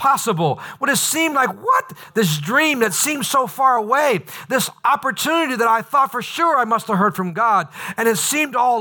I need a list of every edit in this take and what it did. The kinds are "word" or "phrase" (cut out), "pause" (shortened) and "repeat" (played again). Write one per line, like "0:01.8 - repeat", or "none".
none